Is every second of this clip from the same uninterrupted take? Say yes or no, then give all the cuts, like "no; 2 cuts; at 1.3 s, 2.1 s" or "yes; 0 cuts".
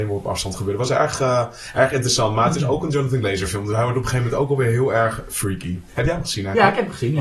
yes; 0 cuts